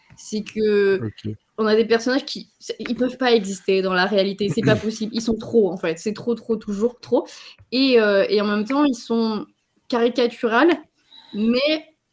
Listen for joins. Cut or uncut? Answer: uncut